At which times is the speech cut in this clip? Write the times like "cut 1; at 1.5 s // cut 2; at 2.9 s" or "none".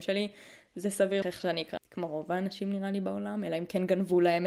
cut 1; at 1.2 s // cut 2; at 1.8 s

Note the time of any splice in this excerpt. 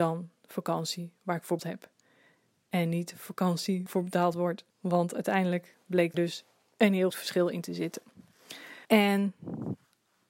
cut 1; at 1.6 s // cut 2; at 3.9 s // cut 3; at 4.7 s // cut 4; at 6.1 s // cut 5; at 7.1 s // cut 6; at 8.8 s

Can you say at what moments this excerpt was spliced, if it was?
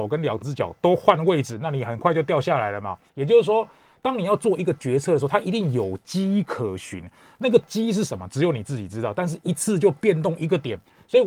cut 1; at 3.1 s

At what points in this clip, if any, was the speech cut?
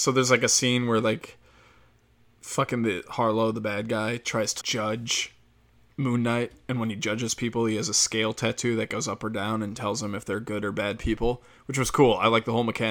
cut 1; at 4.6 s

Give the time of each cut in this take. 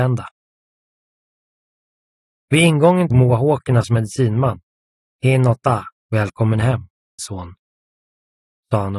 cut 1; at 3.1 s // cut 2; at 6.0 s // cut 3; at 7.2 s

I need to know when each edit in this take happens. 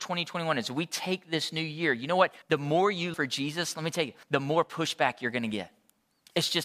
cut 1; at 2.4 s // cut 2; at 3.1 s // cut 3; at 4.2 s

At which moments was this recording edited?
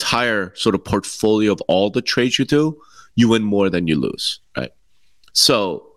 cut 1; at 4.5 s

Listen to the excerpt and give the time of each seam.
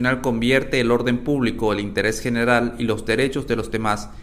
none

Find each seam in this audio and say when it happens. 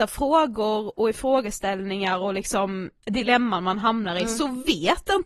cut 1; at 3.0 s

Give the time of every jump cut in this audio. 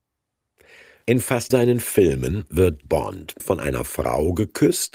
cut 1; at 1.5 s // cut 2; at 2.8 s // cut 3; at 3.4 s

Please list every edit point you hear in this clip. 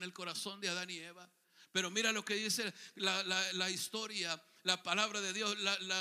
none

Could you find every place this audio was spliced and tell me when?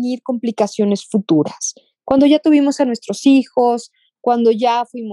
none

